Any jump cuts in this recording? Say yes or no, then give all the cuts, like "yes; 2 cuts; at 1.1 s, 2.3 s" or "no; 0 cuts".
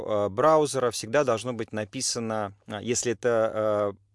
no; 0 cuts